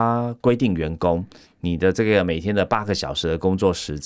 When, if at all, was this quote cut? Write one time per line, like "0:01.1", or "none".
none